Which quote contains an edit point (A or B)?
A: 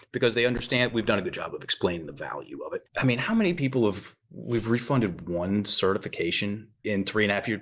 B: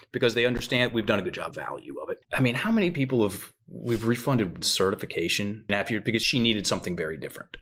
B